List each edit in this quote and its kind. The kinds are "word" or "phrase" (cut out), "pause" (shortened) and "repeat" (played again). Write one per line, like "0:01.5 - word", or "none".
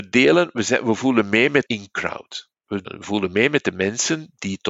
0:01.7 - word